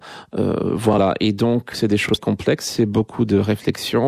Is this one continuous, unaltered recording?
no; 2 cuts; at 1.7 s, 2.2 s

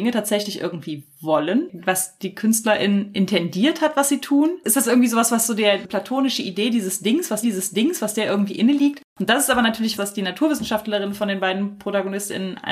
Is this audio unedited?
no; 2 cuts; at 7.4 s, 10.0 s

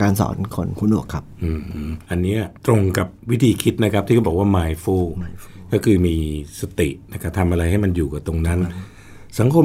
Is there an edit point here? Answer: yes; 3 cuts; at 2.0 s, 2.6 s, 3.2 s

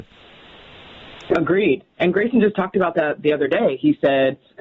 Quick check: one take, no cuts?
yes; 0 cuts

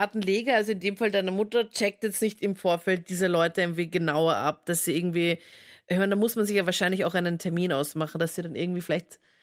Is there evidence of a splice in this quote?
no; 0 cuts

